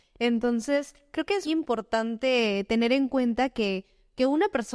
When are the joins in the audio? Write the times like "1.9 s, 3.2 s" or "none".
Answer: 1.4 s